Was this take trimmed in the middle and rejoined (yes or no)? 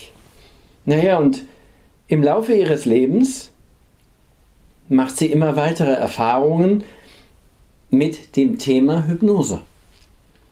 no